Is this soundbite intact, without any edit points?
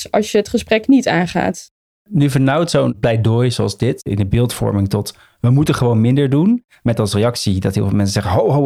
yes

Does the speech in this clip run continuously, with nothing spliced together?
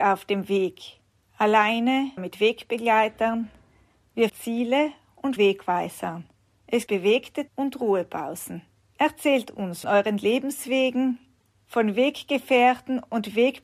no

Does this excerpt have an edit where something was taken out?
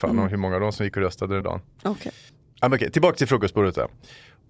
yes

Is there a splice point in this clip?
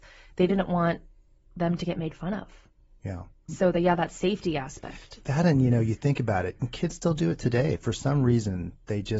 no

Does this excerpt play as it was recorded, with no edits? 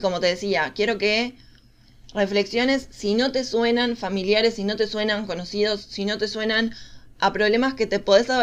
yes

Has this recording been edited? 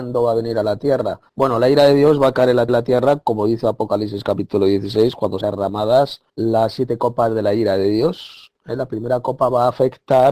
yes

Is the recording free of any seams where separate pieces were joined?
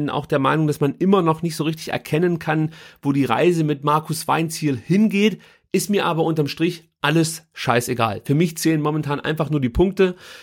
yes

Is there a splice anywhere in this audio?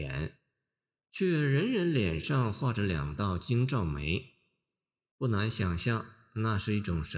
no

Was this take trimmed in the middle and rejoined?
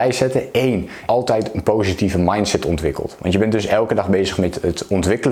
yes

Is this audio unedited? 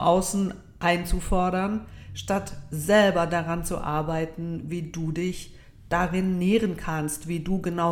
yes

